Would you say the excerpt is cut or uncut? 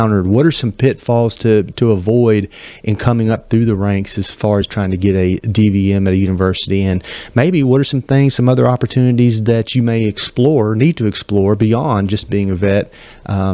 uncut